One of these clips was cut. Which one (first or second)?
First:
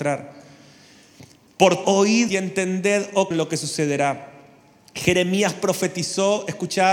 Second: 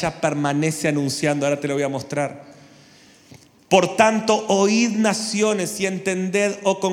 first